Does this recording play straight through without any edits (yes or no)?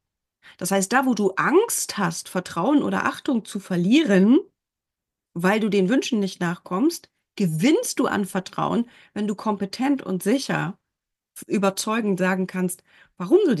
yes